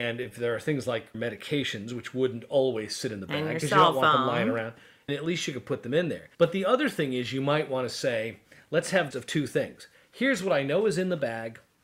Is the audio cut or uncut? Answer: cut